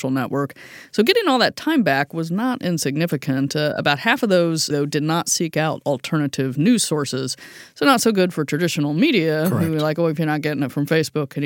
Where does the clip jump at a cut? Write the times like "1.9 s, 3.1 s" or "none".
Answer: 4.7 s

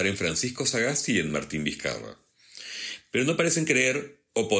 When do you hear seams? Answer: none

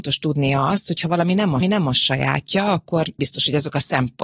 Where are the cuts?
1.6 s, 3.2 s

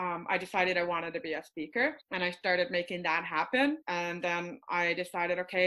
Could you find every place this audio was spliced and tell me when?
2.0 s, 3.8 s

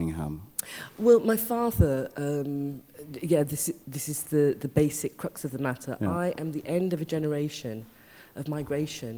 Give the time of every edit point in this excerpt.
3.8 s

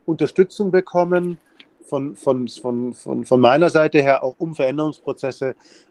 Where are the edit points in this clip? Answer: none

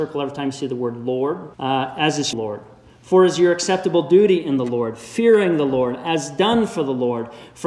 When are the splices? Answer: 1.5 s, 2.3 s

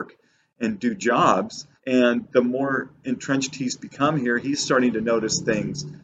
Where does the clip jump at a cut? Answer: 1.8 s

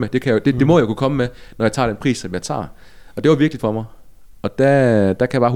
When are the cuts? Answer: 3.6 s

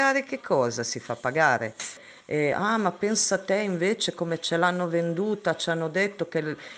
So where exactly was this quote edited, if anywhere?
none

